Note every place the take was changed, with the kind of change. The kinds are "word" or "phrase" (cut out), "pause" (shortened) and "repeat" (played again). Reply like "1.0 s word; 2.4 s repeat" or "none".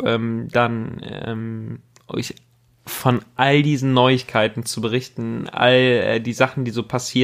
none